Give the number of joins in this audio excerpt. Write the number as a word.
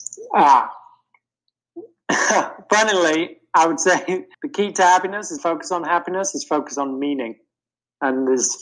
two